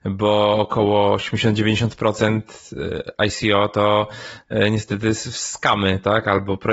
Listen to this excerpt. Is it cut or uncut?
uncut